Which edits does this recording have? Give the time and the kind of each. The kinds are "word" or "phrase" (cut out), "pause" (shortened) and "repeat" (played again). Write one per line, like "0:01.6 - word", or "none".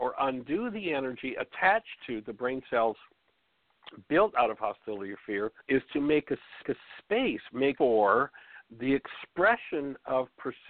0:05.6 - pause
0:06.6 - repeat
0:07.8 - word